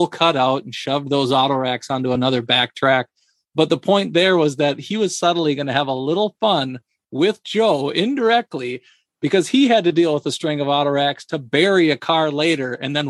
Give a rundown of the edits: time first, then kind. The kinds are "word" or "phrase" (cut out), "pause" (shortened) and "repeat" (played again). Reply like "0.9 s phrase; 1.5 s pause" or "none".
none

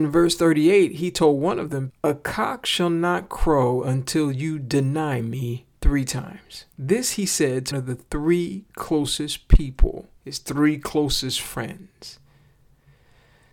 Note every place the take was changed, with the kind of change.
1.9 s word; 5.7 s pause; 6.7 s pause; 7.7 s word; 10.2 s pause

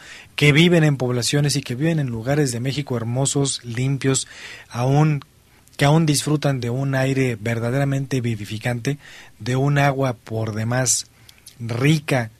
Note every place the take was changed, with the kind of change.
none

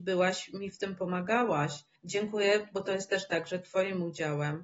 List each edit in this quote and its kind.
2.0 s pause

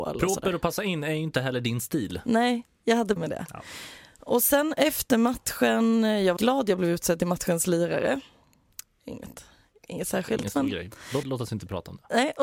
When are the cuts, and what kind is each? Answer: 3.2 s word; 6.4 s word; 11.2 s word

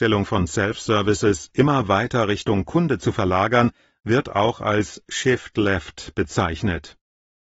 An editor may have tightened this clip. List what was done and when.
none

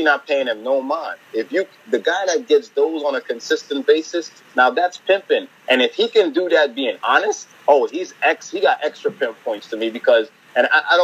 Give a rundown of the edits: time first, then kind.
7.5 s pause

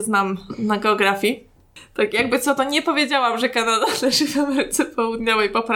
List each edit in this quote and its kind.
none

